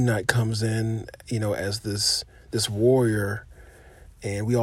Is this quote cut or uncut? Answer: uncut